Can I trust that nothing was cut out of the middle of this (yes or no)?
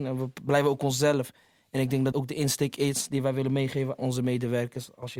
no